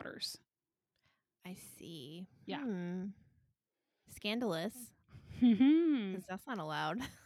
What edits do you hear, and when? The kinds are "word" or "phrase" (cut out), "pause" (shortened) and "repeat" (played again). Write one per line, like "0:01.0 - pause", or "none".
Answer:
none